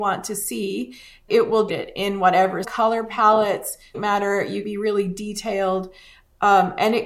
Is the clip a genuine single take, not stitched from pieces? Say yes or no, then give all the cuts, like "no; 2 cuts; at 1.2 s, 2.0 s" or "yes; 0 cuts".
no; 5 cuts; at 1.3 s, 1.7 s, 2.6 s, 3.9 s, 4.6 s